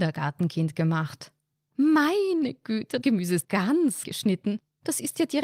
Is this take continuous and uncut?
no; 3 cuts; at 3.0 s, 3.4 s, 4.0 s

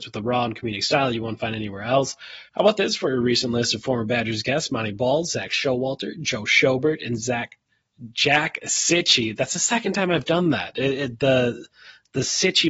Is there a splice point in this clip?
yes; 1 cut; at 2.5 s

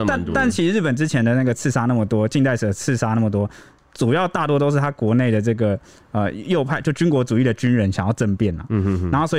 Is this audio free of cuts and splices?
yes; 0 cuts

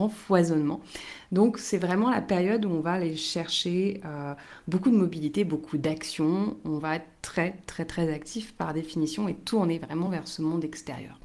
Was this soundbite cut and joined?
no; 0 cuts

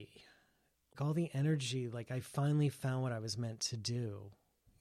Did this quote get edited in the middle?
no; 0 cuts

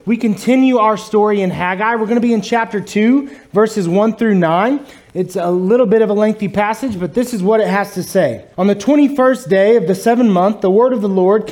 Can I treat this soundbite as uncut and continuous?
no; 1 cut; at 8.5 s

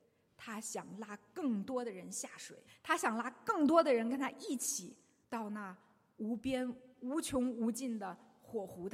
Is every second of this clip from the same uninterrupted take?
no; 2 cuts; at 2.7 s, 5.2 s

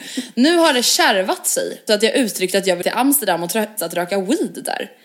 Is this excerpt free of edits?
no; 3 cuts; at 1.9 s, 2.8 s, 3.8 s

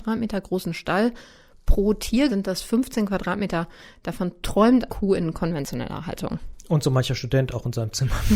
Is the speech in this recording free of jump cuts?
no; 2 cuts; at 2.3 s, 4.9 s

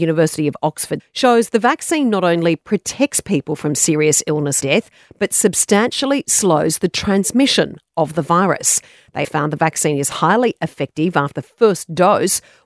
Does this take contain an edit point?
yes; 4 cuts; at 1.0 s, 4.6 s, 9.2 s, 11.3 s

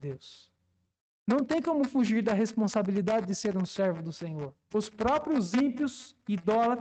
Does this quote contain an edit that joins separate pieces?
yes; 1 cut; at 4.6 s

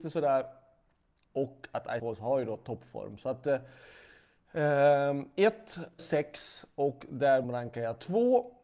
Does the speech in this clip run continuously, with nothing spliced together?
no; 3 cuts; at 2.0 s, 6.0 s, 7.4 s

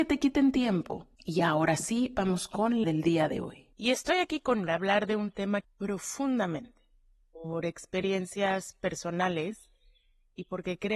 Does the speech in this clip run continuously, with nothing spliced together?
no; 5 cuts; at 1.1 s, 2.8 s, 3.7 s, 4.7 s, 5.6 s

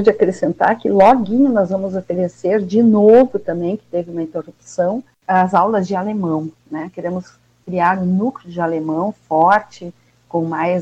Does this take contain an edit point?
no; 0 cuts

